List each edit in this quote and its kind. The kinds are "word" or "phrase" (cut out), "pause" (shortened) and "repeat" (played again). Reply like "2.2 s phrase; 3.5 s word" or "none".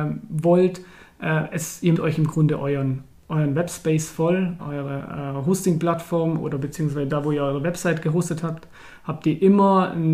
2.0 s word; 3.1 s word; 4.6 s word